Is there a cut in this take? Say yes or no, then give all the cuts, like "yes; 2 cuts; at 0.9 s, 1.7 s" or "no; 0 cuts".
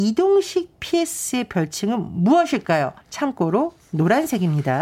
yes; 1 cut; at 3.0 s